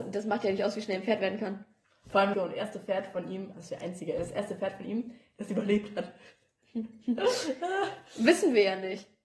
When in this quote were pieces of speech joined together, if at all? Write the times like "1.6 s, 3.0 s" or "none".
1.8 s, 2.3 s, 3.5 s